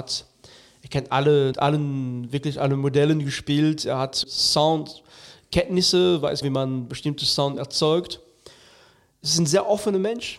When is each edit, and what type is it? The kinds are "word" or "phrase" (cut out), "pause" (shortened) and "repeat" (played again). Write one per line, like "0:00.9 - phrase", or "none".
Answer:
0:01.5 - phrase
0:04.2 - word
0:06.4 - word